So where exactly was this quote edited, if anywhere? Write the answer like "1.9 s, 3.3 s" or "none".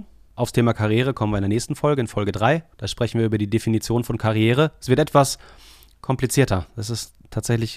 2.7 s